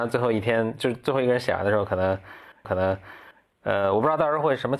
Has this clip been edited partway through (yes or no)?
yes